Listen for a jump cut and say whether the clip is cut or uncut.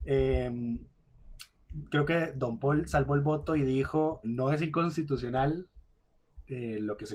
cut